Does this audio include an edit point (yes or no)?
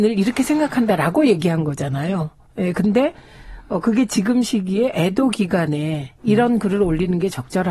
no